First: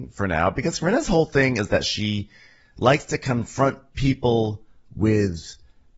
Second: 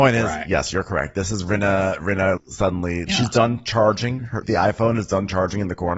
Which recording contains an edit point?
second; 3 cuts; at 2.4 s, 3.1 s, 4.4 s

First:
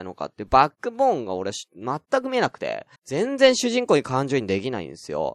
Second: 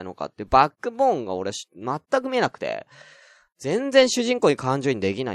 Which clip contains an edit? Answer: first; 1 cut; at 3.0 s

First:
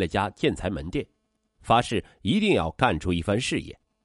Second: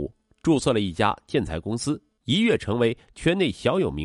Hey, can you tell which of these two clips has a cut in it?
second; 1 cut; at 2.1 s

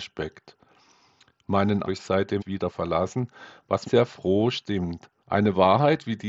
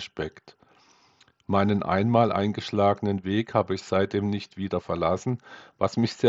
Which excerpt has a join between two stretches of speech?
first; 4 cuts; at 1.8 s, 2.4 s, 3.8 s, 5.2 s

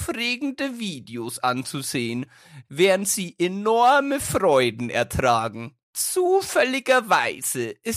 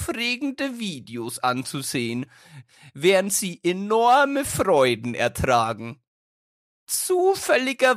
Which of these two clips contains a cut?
first; 2 cuts; at 2.7 s, 5.8 s

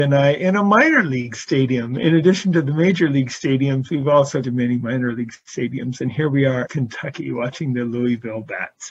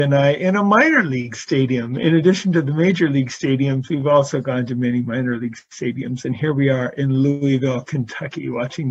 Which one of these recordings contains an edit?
first; 2 cuts; at 4.4 s, 6.7 s

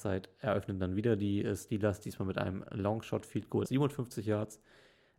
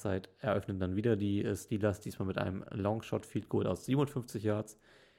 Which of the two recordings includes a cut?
first; 1 cut; at 3.6 s

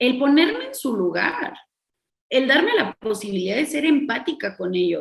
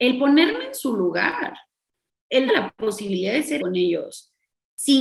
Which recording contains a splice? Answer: second; 2 cuts; at 2.5 s, 3.6 s

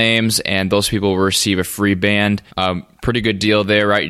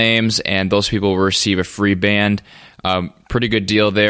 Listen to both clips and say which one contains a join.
first; 1 cut; at 2.5 s

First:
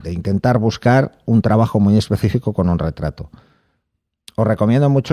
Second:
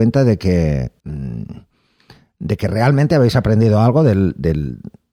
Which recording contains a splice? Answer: second; 1 cut; at 1.0 s

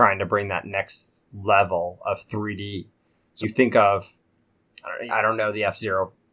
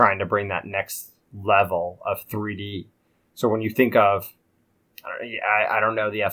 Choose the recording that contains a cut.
first; 2 cuts; at 3.4 s, 5.1 s

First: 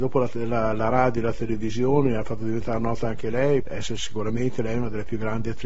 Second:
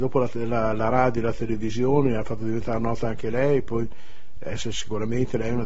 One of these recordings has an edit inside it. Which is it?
first; 1 cut; at 3.6 s

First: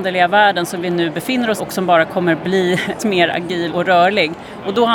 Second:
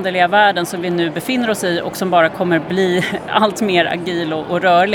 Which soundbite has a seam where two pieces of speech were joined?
first; 3 cuts; at 1.6 s, 3.0 s, 3.7 s

